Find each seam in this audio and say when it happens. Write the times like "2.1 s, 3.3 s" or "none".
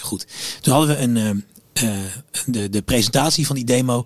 none